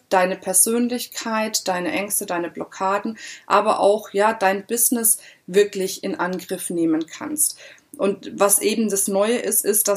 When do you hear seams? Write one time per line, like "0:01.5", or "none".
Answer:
none